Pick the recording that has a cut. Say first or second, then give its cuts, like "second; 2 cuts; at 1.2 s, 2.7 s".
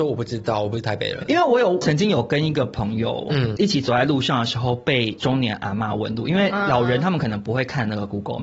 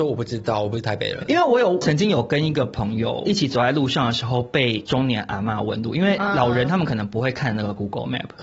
second; 1 cut; at 3.2 s